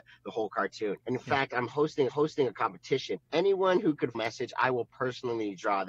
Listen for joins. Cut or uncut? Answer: cut